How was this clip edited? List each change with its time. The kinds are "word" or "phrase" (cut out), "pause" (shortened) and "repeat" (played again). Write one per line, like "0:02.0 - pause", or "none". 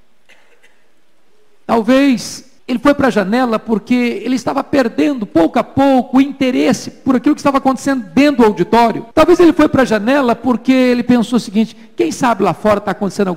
0:02.6 - pause
0:09.1 - pause